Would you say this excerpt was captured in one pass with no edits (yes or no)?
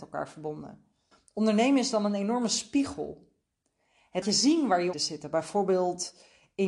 no